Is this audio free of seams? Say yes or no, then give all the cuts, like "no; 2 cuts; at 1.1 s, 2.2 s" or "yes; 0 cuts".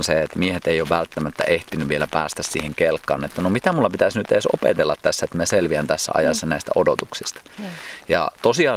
yes; 0 cuts